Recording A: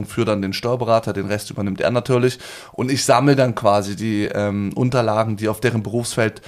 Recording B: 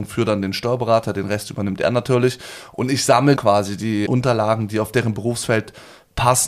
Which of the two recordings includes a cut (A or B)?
B